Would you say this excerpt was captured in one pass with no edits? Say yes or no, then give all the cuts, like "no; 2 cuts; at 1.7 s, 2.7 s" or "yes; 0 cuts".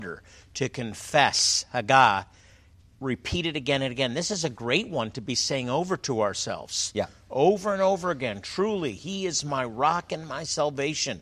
yes; 0 cuts